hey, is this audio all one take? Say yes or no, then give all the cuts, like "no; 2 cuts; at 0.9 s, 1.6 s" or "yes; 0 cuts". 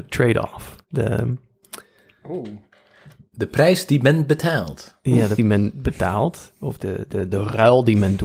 no; 2 cuts; at 5.4 s, 6.8 s